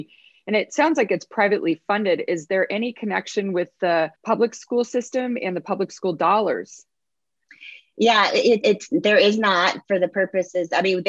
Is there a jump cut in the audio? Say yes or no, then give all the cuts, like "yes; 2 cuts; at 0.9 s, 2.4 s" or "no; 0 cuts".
yes; 3 cuts; at 4.2 s, 8.6 s, 9.9 s